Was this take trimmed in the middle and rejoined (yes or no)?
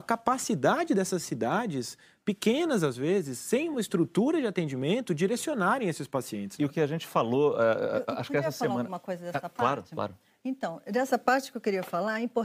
no